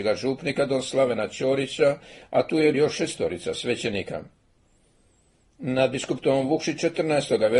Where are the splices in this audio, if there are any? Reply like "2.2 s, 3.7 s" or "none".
2.7 s